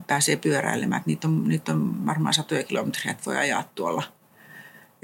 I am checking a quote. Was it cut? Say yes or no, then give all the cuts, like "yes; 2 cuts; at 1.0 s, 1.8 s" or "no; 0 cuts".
no; 0 cuts